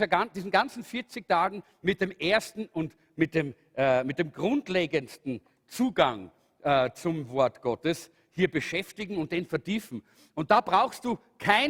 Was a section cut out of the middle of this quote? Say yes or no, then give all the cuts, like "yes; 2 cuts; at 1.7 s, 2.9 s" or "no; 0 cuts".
no; 0 cuts